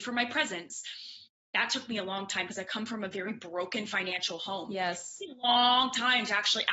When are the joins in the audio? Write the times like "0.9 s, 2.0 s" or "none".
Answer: 2.5 s